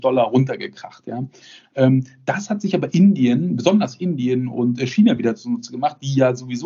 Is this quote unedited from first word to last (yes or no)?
yes